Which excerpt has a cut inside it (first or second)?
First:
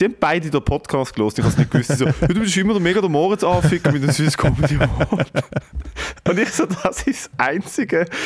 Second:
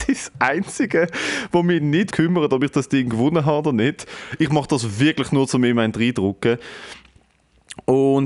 second